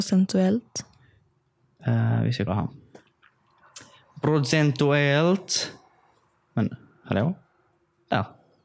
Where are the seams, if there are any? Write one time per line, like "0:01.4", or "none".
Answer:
0:02.5

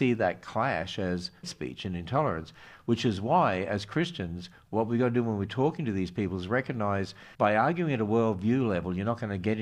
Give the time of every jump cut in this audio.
0:01.4
0:07.3

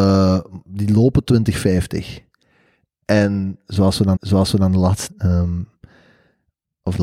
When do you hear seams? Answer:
0:01.3
0:04.2
0:05.1

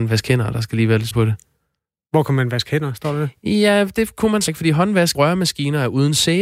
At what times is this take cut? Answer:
0:01.1
0:04.5
0:05.1

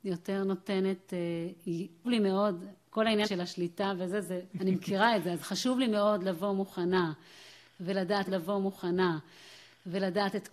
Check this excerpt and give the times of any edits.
0:02.0
0:03.2
0:04.5
0:08.3

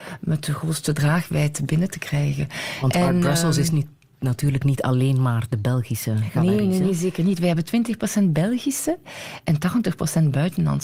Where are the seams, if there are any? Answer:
none

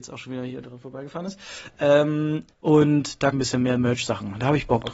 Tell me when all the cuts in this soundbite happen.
0:02.5
0:03.3

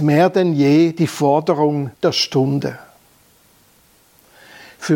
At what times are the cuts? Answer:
0:01.9

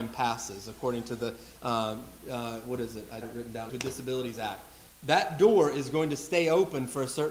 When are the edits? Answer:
0:03.2
0:03.7

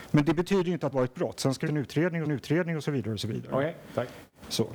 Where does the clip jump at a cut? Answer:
0:00.9
0:01.7
0:02.3

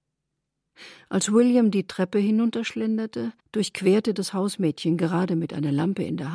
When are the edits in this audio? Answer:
0:03.4

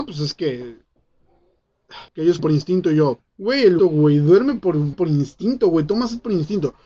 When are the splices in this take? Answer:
0:02.1
0:02.4
0:03.3
0:03.8
0:04.9

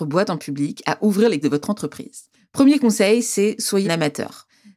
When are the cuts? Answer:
0:01.4
0:02.3
0:03.8

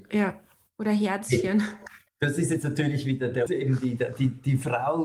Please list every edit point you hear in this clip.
0:03.5

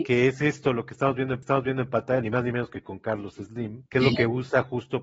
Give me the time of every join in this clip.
0:01.4
0:03.9

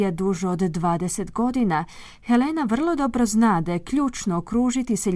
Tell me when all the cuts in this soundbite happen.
none

